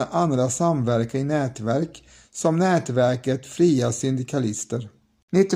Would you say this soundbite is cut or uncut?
uncut